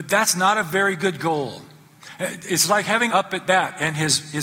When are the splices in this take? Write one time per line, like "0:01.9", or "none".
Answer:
0:03.1